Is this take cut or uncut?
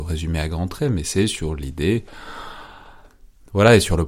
uncut